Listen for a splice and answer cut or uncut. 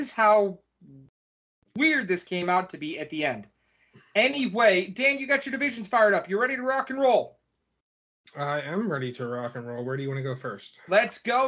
uncut